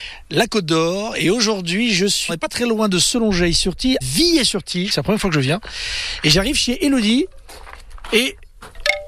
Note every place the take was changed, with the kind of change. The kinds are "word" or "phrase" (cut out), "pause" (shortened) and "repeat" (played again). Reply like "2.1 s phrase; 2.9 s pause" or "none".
2.3 s word; 4.0 s word; 4.9 s phrase